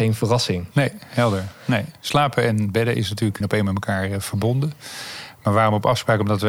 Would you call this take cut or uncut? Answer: cut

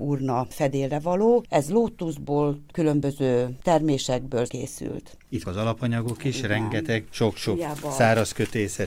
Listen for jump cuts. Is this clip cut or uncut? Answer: cut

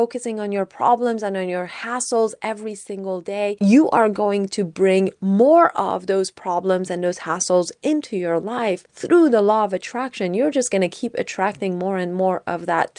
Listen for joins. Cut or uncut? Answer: uncut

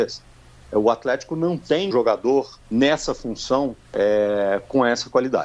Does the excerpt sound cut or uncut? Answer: cut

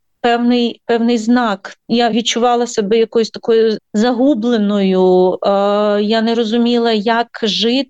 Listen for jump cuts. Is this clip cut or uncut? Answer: cut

